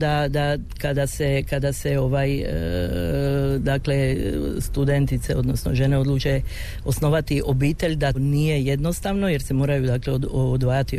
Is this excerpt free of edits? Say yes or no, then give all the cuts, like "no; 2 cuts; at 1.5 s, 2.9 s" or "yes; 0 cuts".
no; 1 cut; at 8.1 s